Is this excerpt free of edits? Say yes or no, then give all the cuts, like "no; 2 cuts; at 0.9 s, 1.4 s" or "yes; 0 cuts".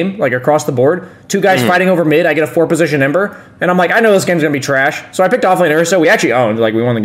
yes; 0 cuts